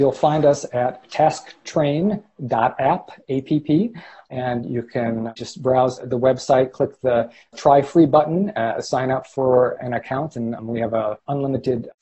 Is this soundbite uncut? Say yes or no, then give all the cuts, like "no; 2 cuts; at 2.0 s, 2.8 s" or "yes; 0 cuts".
yes; 0 cuts